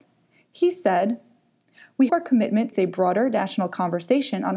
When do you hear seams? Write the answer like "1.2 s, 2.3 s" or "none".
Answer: 2.1 s, 2.7 s